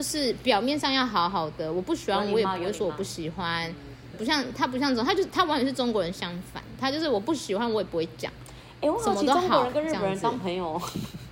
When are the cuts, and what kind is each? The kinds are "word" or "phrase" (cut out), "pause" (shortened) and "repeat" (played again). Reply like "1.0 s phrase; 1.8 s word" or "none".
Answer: 4.1 s word

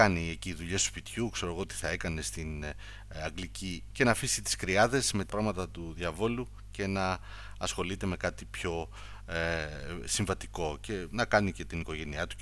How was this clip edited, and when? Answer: 3.9 s word; 5.3 s phrase

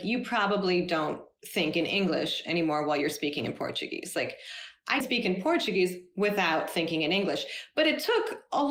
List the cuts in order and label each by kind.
5.0 s word

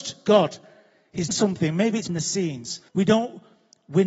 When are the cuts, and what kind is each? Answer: 1.3 s word; 2.1 s word; 2.9 s pause

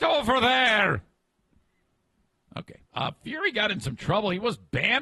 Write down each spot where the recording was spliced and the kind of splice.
2.8 s pause

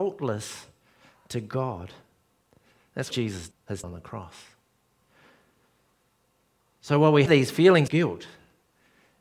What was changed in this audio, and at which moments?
3.1 s word; 3.5 s word; 3.8 s word; 7.3 s word; 7.9 s word

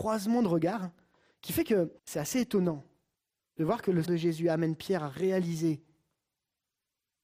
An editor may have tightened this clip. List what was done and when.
2.0 s pause; 3.1 s pause; 4.0 s phrase

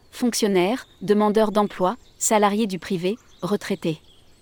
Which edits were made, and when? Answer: none

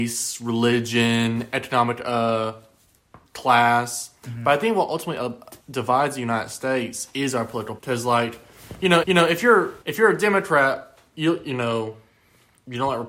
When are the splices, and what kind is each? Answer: 3.3 s pause; 5.6 s pause; 7.8 s word; 9.0 s repeat; 9.8 s pause; 11.1 s pause

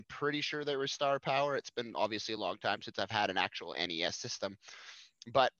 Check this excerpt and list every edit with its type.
none

